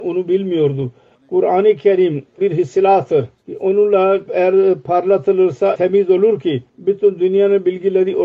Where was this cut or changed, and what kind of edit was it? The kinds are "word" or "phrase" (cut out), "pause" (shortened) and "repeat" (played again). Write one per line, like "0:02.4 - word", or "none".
0:01.1 - pause
0:02.4 - word
0:03.4 - pause
0:04.3 - word
0:05.7 - word
0:06.7 - pause